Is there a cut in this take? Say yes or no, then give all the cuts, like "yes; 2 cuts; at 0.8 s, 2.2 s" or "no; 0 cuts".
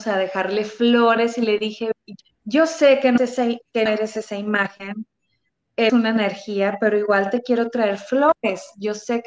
yes; 4 cuts; at 2.2 s, 3.2 s, 3.9 s, 5.9 s